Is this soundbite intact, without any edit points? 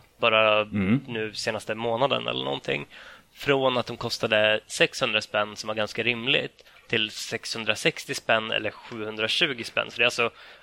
yes; 0 cuts

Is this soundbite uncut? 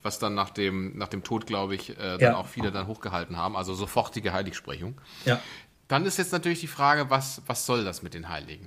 yes; 0 cuts

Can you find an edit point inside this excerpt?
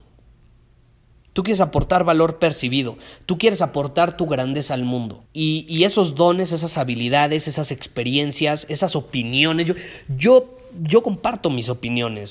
yes; 1 cut; at 5.3 s

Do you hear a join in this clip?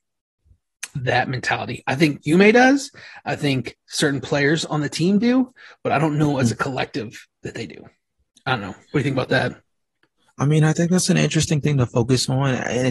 no; 0 cuts

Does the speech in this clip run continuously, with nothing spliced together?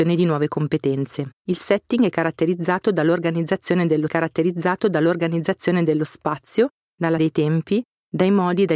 no; 3 cuts; at 1.4 s, 4.1 s, 7.2 s

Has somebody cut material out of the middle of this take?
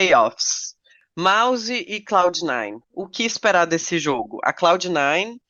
yes; 1 cut; at 2.8 s

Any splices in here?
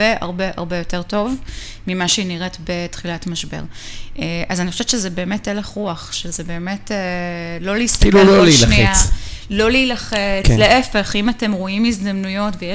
no; 0 cuts

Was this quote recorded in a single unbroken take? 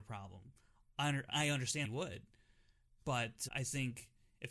no; 3 cuts; at 1.3 s, 1.8 s, 3.5 s

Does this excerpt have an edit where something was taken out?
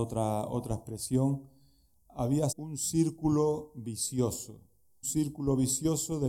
yes; 2 cuts; at 2.5 s, 5.0 s

